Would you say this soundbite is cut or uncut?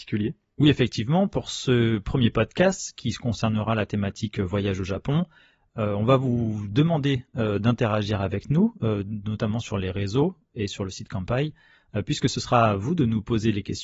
uncut